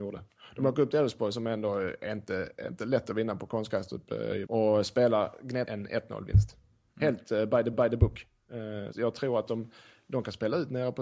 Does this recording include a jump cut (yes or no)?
yes